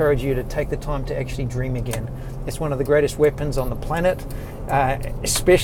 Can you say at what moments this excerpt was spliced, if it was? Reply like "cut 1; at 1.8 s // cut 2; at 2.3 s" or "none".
none